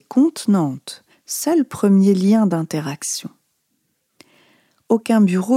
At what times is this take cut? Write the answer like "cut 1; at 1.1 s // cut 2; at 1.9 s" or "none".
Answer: cut 1; at 1.1 s